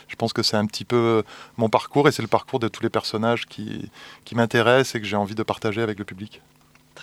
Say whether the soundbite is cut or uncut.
uncut